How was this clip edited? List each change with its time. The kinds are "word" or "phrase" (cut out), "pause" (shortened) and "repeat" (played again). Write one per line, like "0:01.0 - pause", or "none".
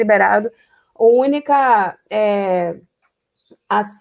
none